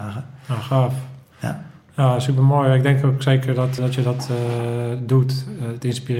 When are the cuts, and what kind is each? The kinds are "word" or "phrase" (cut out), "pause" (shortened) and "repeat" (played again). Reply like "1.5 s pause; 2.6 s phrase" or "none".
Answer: 3.8 s word